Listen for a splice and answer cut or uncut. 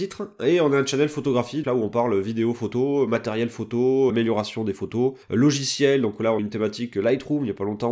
cut